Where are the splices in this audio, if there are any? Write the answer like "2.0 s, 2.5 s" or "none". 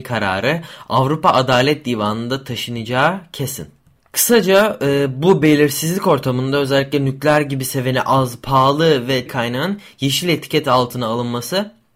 4.0 s, 9.3 s